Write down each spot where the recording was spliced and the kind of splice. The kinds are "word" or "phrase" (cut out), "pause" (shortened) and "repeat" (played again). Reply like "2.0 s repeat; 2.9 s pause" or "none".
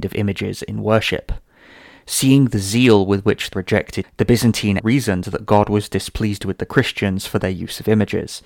3.5 s word; 4.0 s word; 4.8 s word